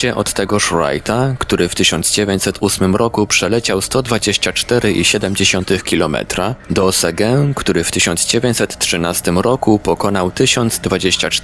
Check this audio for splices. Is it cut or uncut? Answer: uncut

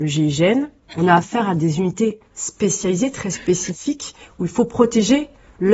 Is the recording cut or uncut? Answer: uncut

